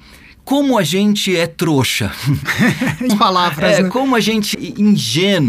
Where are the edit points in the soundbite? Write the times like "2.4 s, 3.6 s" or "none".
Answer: 3.1 s, 4.5 s

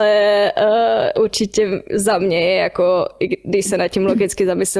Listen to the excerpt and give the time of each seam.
none

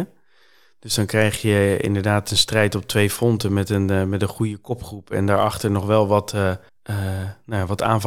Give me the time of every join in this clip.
6.7 s

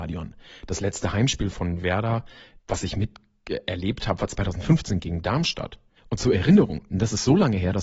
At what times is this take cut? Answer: 1.5 s, 2.6 s, 6.0 s

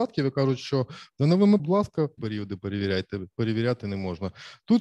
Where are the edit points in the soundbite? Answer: 1.6 s, 2.2 s, 3.3 s

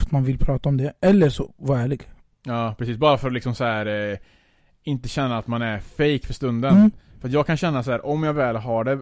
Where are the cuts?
none

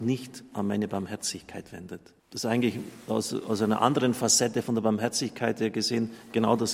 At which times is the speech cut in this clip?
2.2 s

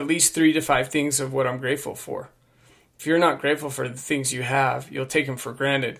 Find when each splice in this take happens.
none

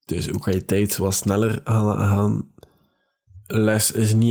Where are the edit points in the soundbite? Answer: none

